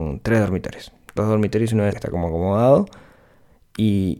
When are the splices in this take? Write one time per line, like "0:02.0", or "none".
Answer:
0:01.2
0:01.9